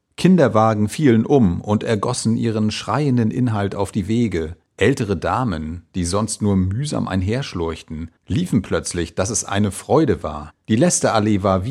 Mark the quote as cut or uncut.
cut